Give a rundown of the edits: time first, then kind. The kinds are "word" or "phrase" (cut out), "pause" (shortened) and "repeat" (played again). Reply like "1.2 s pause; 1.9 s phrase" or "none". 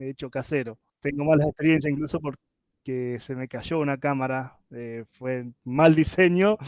4.6 s pause; 5.6 s pause